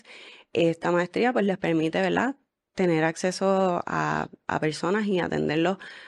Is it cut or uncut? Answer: uncut